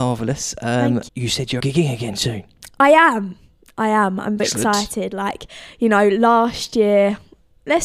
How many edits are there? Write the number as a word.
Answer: three